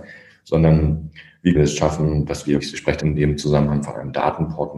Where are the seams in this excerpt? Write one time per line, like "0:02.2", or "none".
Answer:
0:01.5
0:02.6
0:03.0